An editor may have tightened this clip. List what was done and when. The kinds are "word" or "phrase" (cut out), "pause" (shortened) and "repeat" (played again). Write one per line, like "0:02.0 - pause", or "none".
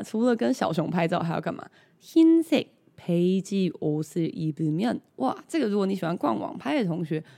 none